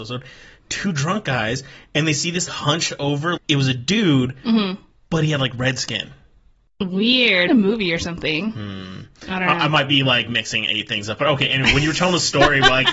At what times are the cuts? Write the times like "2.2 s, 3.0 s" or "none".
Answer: 2.5 s, 3.4 s, 7.5 s